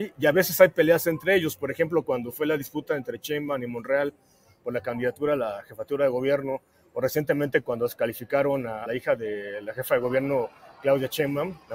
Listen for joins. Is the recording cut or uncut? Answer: cut